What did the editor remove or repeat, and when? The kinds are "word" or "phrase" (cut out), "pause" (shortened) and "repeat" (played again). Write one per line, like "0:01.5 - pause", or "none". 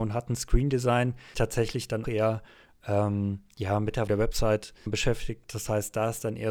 0:01.3 - word
0:02.0 - word
0:04.1 - word
0:04.9 - word